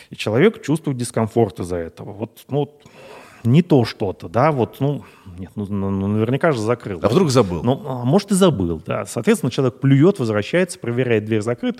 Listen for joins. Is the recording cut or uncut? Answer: uncut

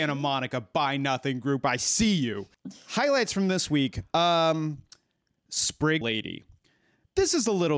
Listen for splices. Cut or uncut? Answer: cut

